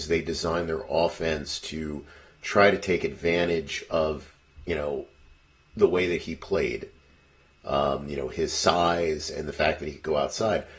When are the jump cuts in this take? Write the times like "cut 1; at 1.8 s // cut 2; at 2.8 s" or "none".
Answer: none

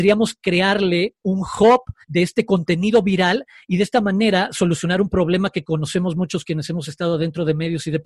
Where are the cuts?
cut 1; at 2.0 s

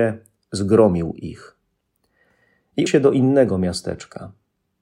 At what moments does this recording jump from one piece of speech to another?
cut 1; at 2.9 s

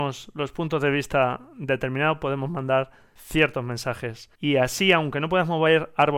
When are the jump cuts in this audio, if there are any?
cut 1; at 4.3 s

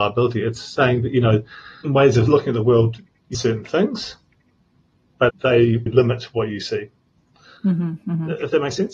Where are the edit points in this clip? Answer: cut 1; at 1.8 s // cut 2; at 3.3 s // cut 3; at 5.3 s // cut 4; at 5.9 s

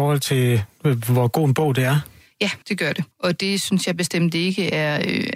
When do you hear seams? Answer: cut 1; at 2.6 s // cut 2; at 3.1 s

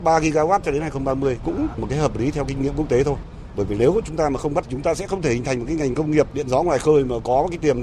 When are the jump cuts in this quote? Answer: cut 1; at 1.8 s // cut 2; at 4.6 s

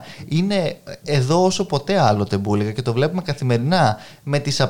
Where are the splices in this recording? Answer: none

